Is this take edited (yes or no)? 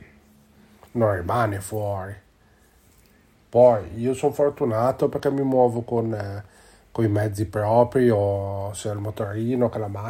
no